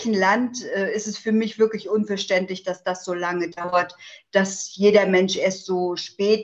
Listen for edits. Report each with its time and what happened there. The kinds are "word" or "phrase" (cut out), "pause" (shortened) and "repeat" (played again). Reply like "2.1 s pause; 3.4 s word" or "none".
none